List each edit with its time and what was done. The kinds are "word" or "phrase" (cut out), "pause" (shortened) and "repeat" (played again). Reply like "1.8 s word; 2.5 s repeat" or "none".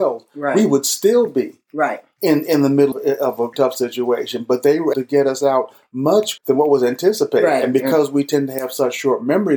2.9 s word; 3.5 s word; 4.9 s word; 6.4 s word